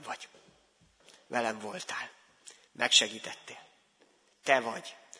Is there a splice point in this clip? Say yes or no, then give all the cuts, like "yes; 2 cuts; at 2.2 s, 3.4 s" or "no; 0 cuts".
no; 0 cuts